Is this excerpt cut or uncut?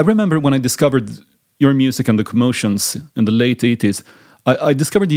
uncut